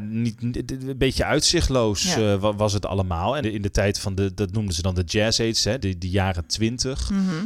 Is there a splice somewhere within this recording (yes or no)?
yes